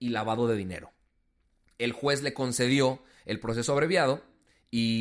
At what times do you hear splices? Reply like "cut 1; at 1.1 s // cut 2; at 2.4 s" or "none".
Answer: none